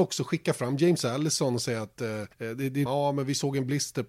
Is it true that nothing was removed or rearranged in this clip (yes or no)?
no